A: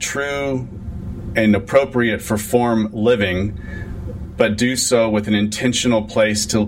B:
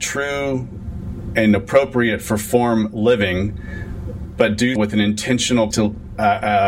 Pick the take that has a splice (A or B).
B